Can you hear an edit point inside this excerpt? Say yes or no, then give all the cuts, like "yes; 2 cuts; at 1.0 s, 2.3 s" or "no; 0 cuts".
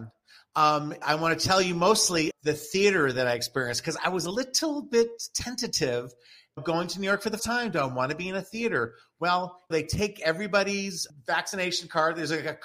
yes; 5 cuts; at 1.0 s, 2.3 s, 6.6 s, 7.4 s, 9.7 s